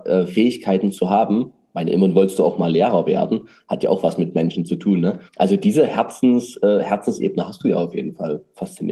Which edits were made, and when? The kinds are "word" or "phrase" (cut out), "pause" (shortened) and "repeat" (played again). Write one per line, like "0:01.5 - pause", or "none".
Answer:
0:05.3 - pause